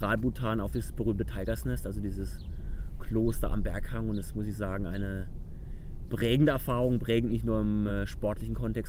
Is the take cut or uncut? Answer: uncut